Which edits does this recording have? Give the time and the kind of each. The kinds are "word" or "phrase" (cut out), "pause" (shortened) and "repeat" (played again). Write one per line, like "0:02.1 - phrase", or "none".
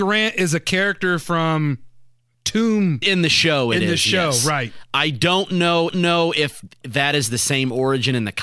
0:03.0 - phrase
0:05.9 - repeat